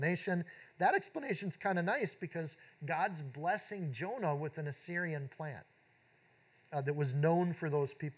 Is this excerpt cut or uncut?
uncut